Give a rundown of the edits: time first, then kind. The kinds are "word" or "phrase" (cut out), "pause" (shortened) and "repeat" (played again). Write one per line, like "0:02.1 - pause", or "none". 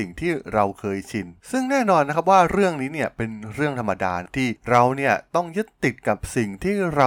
0:01.4 - pause